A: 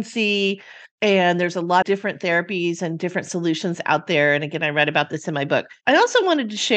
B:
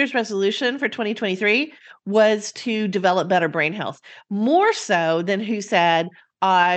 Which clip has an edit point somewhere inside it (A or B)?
A